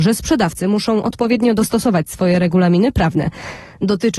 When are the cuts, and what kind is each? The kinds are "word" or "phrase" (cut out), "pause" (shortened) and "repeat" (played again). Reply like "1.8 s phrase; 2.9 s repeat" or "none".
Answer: none